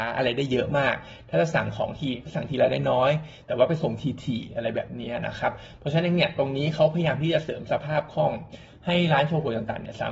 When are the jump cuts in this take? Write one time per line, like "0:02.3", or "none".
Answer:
none